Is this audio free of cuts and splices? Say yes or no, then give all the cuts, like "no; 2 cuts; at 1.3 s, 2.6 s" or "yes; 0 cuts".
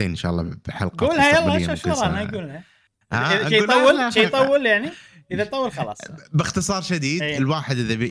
yes; 0 cuts